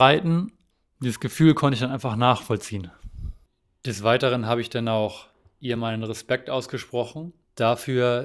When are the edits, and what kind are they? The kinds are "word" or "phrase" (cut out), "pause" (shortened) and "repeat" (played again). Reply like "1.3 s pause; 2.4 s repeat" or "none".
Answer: none